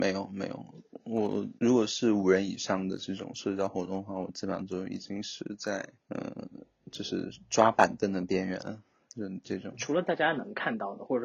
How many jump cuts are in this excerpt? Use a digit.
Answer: 2